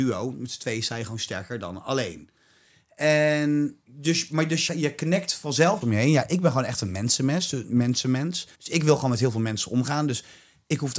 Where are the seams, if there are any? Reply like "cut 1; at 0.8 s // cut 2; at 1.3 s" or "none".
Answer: cut 1; at 3.8 s // cut 2; at 4.7 s // cut 3; at 5.8 s // cut 4; at 8.5 s

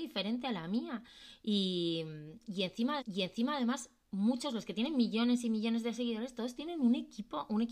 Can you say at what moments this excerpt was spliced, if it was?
cut 1; at 3.0 s

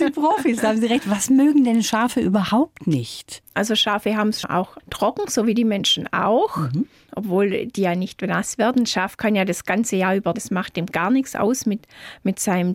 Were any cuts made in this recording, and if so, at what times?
cut 1; at 4.4 s // cut 2; at 4.8 s // cut 3; at 10.3 s

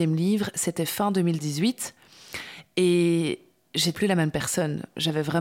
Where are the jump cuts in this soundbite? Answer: cut 1; at 3.9 s

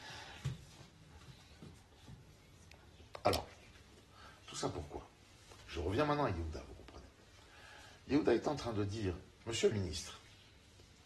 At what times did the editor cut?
cut 1; at 9.7 s

